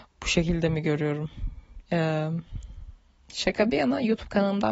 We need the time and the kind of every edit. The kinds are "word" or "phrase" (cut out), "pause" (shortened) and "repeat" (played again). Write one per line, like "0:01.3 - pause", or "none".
none